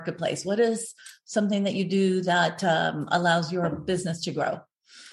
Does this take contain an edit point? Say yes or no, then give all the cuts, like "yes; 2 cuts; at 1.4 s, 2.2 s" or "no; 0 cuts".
no; 0 cuts